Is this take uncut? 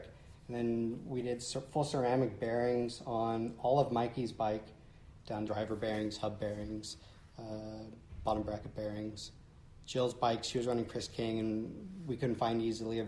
no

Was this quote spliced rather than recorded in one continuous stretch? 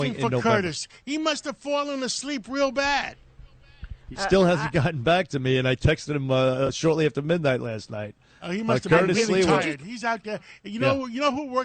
yes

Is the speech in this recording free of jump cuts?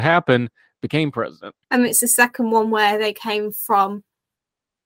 no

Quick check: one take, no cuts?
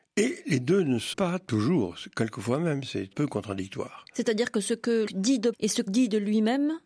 no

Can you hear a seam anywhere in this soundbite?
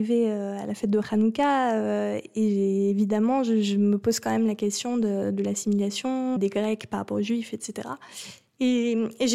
yes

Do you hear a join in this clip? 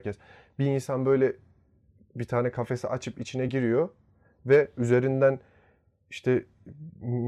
no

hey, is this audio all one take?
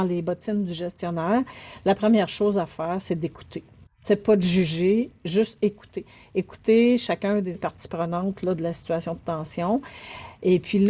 no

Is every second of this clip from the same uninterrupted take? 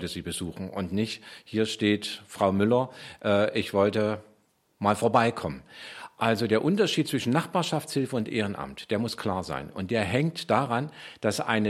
yes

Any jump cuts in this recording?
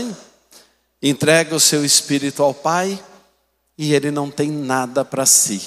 no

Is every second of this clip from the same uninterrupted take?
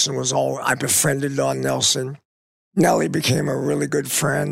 yes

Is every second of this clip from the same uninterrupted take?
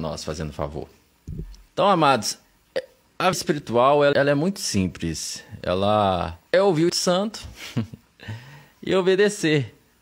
no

